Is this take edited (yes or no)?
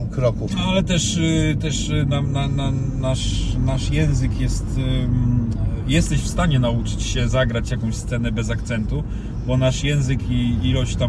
no